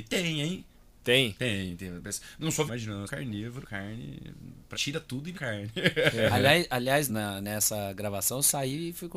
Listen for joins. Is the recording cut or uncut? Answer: cut